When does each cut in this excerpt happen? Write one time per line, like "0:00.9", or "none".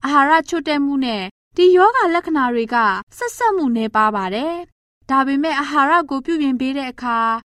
0:03.1